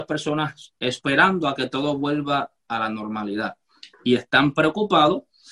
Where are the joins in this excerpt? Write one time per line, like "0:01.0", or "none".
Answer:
0:02.6
0:03.9